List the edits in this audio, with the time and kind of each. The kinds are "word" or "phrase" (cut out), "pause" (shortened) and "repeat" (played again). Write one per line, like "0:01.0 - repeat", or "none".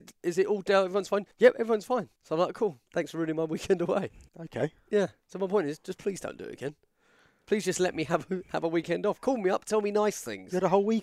0:01.3 - pause
0:02.2 - pause
0:02.9 - pause
0:04.3 - pause